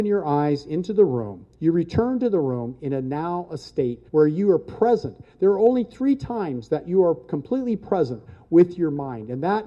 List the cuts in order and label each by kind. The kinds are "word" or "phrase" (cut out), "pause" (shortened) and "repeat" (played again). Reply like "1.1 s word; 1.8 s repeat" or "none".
1.5 s pause; 4.1 s pause